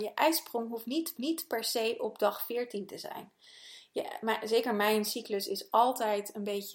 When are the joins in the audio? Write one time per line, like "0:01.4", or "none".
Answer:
0:01.2